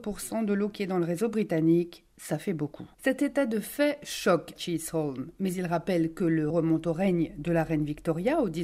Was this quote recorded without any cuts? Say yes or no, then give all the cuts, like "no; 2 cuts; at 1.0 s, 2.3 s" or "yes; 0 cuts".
no; 3 cuts; at 2.9 s, 4.6 s, 6.5 s